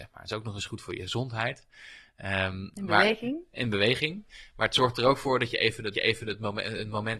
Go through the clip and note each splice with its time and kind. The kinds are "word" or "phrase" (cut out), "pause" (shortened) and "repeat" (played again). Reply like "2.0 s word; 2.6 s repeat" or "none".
5.9 s repeat